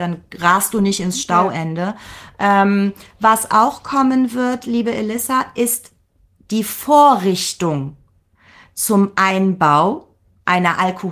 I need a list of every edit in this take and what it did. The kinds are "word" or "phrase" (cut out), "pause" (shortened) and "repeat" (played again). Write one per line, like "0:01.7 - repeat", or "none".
none